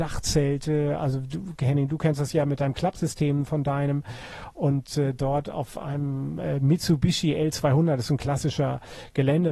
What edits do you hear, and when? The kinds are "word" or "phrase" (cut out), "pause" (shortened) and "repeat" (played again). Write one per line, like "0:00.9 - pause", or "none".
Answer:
none